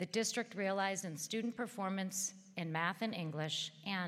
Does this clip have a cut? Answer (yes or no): yes